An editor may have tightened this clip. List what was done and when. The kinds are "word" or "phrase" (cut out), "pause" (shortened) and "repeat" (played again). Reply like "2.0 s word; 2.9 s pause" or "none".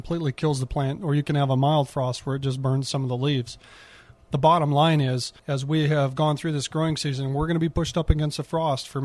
5.4 s pause